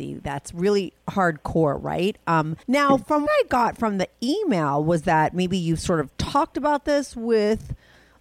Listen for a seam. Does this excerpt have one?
yes; 2 cuts; at 2.6 s, 3.3 s

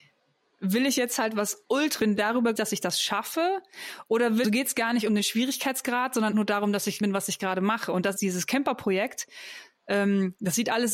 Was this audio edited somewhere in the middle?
yes; 6 cuts; at 2.0 s, 2.6 s, 4.4 s, 6.3 s, 7.0 s, 8.2 s

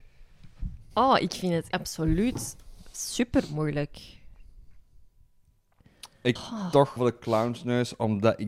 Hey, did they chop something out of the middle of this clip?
yes; 4 cuts; at 0.9 s, 1.7 s, 6.4 s, 7.0 s

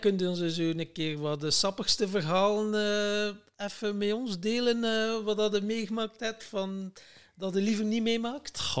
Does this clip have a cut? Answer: no; 0 cuts

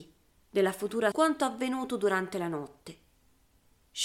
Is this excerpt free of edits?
no; 1 cut; at 1.1 s

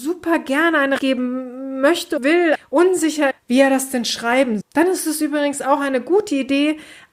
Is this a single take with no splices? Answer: no; 5 cuts; at 1.0 s, 2.2 s, 2.5 s, 3.3 s, 4.6 s

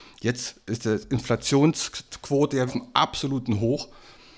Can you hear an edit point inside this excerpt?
yes; 1 cut; at 2.7 s

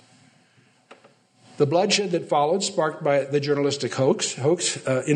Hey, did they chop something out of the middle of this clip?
no; 0 cuts

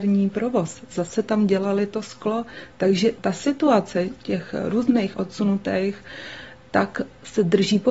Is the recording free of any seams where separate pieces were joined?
no; 1 cut; at 5.1 s

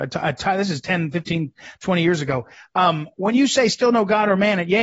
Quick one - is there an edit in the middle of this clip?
no; 0 cuts

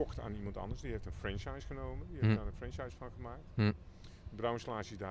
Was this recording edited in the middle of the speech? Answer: no; 0 cuts

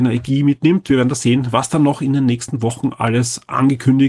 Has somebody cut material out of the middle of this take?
no; 0 cuts

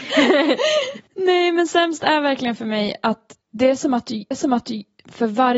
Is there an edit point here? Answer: yes; 2 cuts; at 3.4 s, 4.3 s

